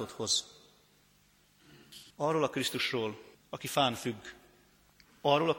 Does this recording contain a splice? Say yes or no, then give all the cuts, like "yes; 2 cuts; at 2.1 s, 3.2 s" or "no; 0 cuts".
yes; 2 cuts; at 2.1 s, 3.3 s